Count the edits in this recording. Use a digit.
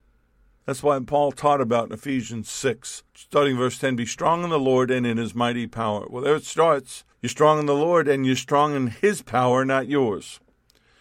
2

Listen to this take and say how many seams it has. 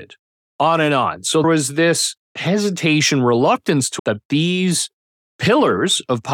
2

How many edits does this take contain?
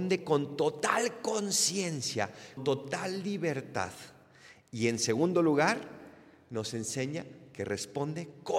1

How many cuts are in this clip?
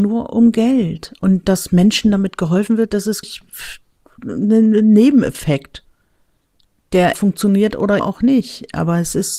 3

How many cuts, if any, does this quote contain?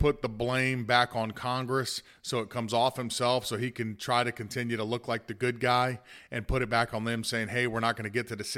0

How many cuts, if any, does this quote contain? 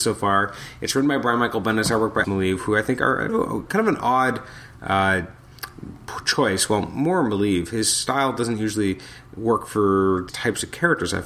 3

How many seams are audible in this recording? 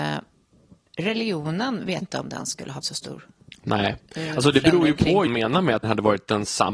5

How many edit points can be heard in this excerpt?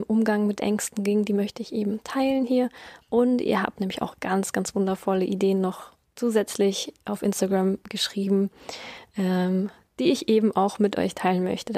0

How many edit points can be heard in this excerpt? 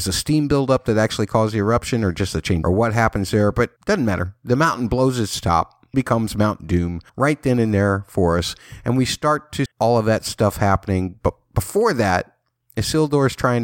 5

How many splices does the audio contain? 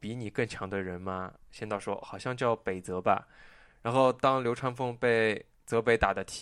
1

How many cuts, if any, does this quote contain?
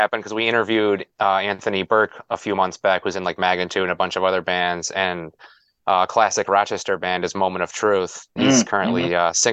1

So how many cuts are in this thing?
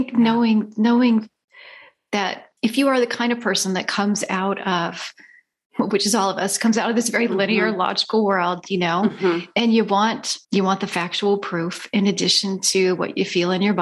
2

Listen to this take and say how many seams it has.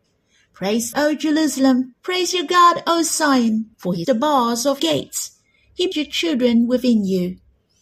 6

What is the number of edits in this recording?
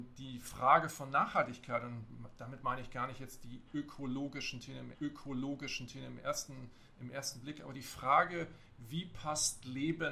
1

